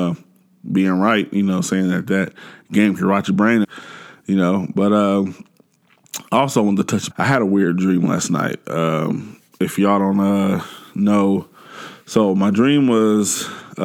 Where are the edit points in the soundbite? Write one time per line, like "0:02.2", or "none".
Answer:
0:03.6
0:07.1